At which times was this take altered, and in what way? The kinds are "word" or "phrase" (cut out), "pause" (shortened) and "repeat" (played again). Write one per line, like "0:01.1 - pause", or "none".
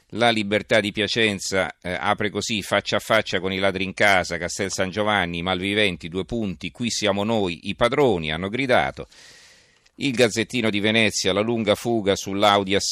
none